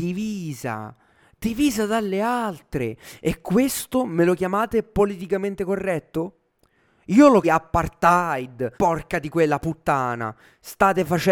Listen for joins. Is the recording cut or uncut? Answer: cut